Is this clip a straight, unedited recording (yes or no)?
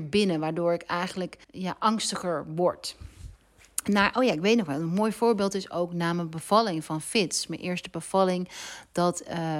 no